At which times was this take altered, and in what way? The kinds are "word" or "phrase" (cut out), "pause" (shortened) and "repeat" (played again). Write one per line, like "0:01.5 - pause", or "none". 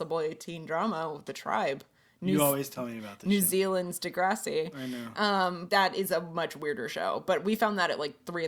0:05.7 - word